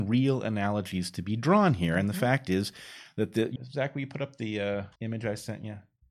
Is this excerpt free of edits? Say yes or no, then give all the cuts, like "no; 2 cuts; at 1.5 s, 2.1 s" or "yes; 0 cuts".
no; 2 cuts; at 3.6 s, 5.0 s